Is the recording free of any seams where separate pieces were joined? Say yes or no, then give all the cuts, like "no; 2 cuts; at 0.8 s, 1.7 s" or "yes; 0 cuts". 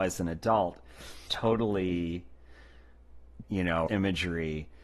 no; 3 cuts; at 1.3 s, 3.4 s, 3.9 s